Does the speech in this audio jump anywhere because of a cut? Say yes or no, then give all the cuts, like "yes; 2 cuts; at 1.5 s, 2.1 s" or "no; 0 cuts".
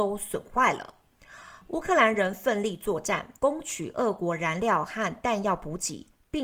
yes; 1 cut; at 3.4 s